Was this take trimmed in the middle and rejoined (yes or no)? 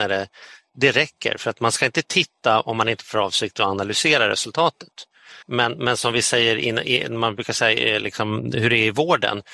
yes